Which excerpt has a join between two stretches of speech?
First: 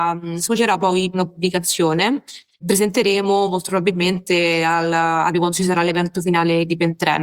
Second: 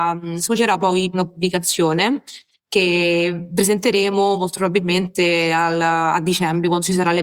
first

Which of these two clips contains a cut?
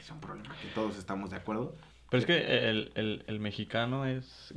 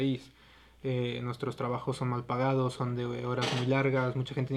first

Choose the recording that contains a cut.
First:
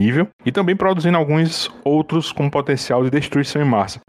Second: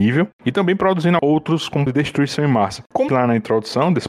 second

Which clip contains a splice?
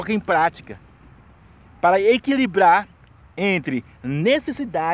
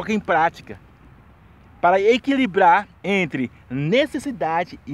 second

